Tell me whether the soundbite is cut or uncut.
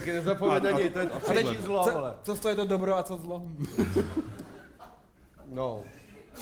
uncut